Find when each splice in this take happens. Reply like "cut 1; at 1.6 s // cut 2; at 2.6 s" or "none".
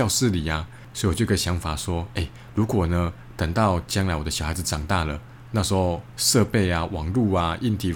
cut 1; at 5.5 s